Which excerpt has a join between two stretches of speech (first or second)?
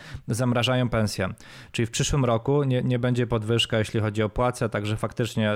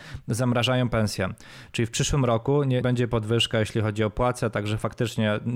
second